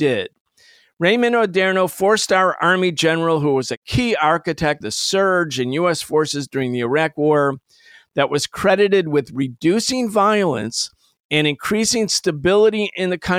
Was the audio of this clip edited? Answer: yes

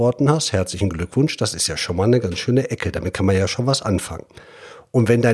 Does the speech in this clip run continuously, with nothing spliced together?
yes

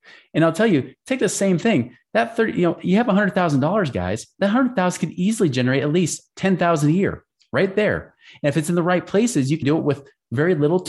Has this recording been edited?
yes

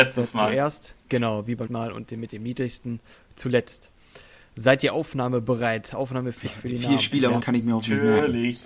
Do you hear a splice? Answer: yes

